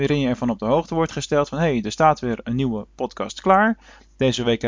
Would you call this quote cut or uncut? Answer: uncut